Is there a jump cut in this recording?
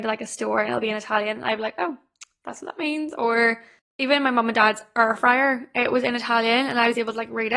no; 0 cuts

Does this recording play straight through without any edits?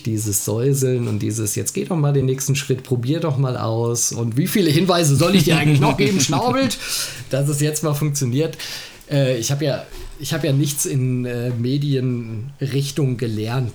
yes; 0 cuts

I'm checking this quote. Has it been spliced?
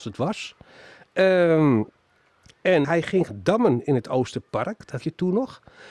yes; 3 cuts; at 2.8 s, 3.3 s, 5.0 s

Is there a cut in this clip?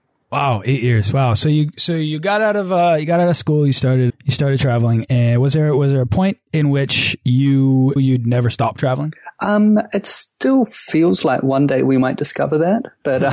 yes; 3 cuts; at 4.1 s, 6.5 s, 8.0 s

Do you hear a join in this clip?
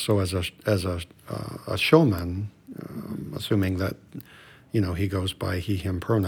no; 0 cuts

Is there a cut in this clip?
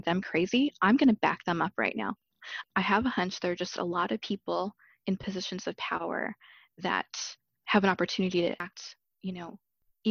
no; 0 cuts

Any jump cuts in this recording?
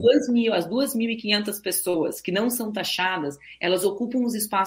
no; 0 cuts

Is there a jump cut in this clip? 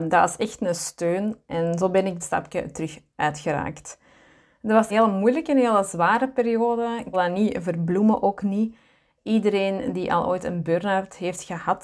yes; 3 cuts; at 2.2 s, 4.9 s, 7.1 s

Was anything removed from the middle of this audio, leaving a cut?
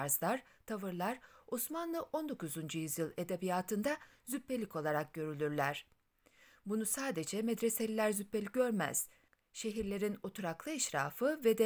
yes; 1 cut; at 8.5 s

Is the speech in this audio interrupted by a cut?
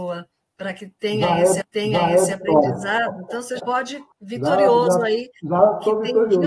yes; 3 cuts; at 1.6 s, 3.6 s, 4.1 s

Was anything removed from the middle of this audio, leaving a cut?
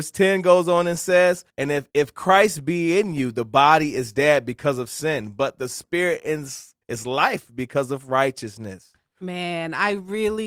yes; 3 cuts; at 1.5 s, 1.9 s, 6.8 s

